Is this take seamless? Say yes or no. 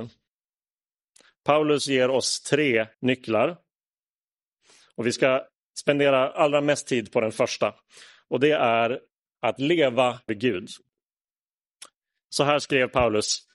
no